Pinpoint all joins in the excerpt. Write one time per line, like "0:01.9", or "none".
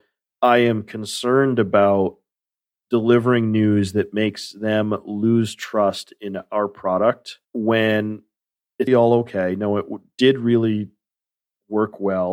0:07.4
0:08.9